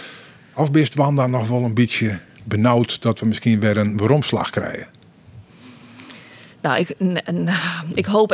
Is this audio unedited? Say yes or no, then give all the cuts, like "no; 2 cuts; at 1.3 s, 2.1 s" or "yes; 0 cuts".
yes; 0 cuts